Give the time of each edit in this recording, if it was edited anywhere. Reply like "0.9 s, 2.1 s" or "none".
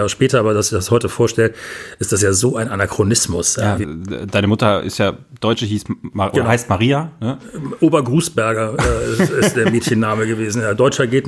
3.8 s